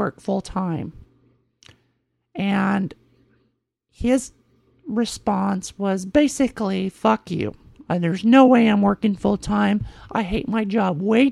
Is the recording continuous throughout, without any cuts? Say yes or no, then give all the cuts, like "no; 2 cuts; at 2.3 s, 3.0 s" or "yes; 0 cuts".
yes; 0 cuts